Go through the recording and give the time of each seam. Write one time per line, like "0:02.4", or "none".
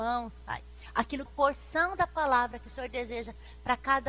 0:01.3